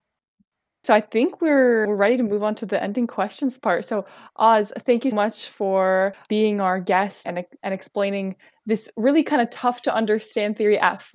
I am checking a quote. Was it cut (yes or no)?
yes